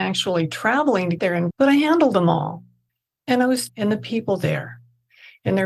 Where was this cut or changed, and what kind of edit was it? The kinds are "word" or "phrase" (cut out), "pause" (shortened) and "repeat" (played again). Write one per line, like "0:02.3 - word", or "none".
0:01.2 - word
0:01.5 - word
0:03.7 - phrase